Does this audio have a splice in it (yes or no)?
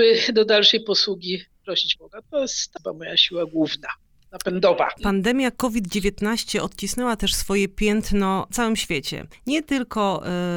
yes